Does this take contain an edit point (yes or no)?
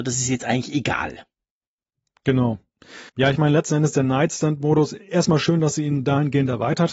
yes